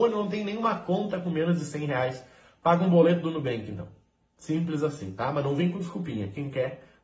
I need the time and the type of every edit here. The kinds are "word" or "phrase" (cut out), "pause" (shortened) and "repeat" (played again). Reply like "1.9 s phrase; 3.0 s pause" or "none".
none